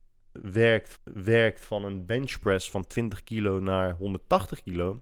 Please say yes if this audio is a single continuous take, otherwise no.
no